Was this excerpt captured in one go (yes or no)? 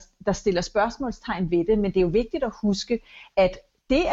yes